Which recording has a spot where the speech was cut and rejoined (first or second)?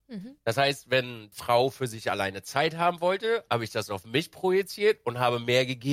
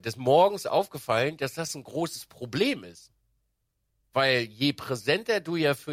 first